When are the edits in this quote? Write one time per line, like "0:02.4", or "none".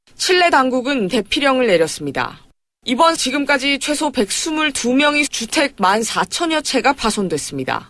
0:01.1
0:03.2
0:05.3